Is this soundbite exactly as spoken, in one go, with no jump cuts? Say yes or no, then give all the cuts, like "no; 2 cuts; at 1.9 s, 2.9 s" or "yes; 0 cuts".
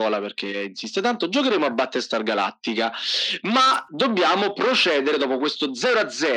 yes; 0 cuts